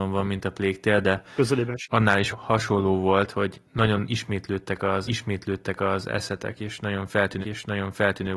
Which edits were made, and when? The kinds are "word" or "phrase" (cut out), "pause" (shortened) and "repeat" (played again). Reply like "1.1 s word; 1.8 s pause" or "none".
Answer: 2.3 s word; 3.7 s pause; 5.1 s repeat; 7.4 s repeat